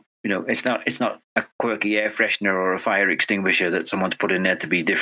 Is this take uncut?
yes; 0 cuts

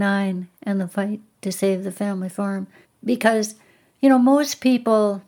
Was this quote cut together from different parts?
no; 0 cuts

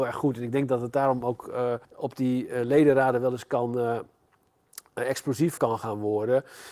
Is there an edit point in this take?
yes; 2 cuts; at 1.8 s, 5.6 s

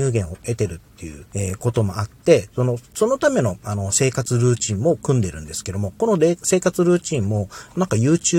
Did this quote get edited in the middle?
yes; 1 cut; at 1.3 s

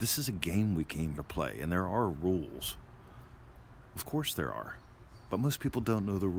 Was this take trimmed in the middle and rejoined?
yes; 1 cut; at 1.1 s

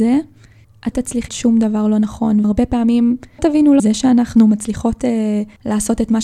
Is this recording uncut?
no; 5 cuts; at 0.9 s, 1.3 s, 2.4 s, 3.4 s, 3.8 s

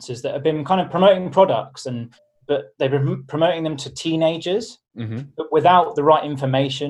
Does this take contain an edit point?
yes; 1 cut; at 2.2 s

